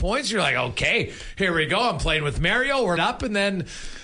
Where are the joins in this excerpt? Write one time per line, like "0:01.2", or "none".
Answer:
0:03.0